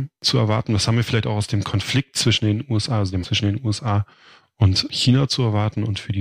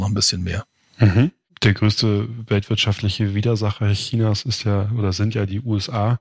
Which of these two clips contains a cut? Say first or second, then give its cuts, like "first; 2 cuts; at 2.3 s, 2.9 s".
first; 1 cut; at 3.2 s